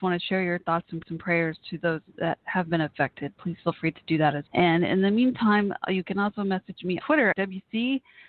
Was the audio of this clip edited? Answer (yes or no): yes